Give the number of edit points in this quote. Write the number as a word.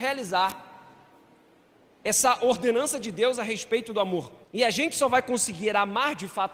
one